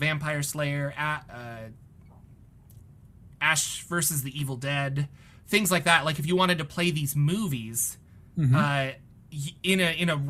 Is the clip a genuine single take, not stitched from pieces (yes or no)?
no